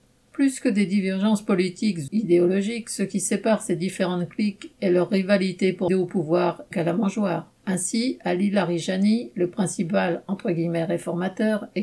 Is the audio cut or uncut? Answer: cut